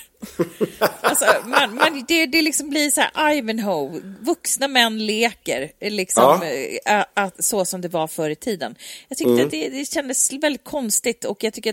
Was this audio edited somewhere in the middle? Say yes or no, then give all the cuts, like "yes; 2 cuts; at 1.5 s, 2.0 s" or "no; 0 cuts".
no; 0 cuts